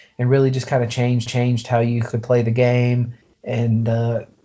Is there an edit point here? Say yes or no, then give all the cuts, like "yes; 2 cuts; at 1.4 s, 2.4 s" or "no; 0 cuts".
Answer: yes; 2 cuts; at 1.3 s, 3.2 s